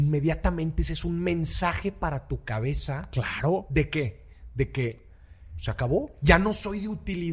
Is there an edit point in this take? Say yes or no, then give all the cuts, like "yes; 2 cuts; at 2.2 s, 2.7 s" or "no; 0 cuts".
no; 0 cuts